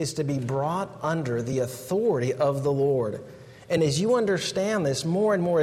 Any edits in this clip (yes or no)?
no